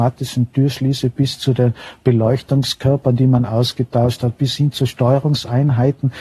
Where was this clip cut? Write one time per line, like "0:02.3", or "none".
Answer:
none